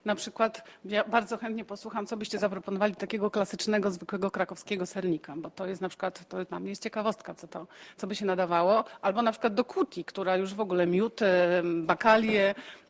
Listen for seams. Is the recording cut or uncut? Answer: uncut